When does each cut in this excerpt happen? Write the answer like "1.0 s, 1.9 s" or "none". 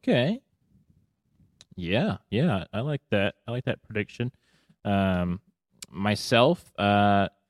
none